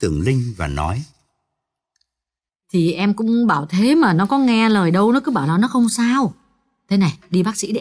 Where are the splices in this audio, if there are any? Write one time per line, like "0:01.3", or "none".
none